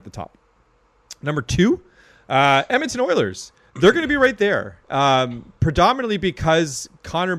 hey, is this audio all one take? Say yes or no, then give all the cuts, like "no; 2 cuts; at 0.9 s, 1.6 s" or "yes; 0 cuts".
yes; 0 cuts